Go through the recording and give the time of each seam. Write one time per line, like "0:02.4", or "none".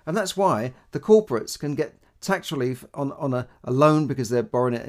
none